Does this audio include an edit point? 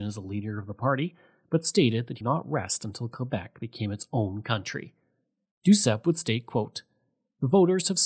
yes; 1 cut; at 2.2 s

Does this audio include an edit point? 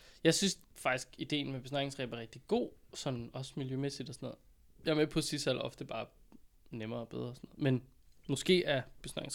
no; 0 cuts

